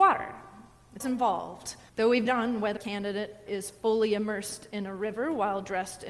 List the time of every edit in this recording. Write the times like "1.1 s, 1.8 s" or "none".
1.0 s, 1.9 s, 2.3 s, 2.8 s, 3.5 s